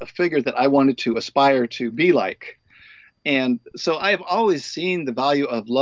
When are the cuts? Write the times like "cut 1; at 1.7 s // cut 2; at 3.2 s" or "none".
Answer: none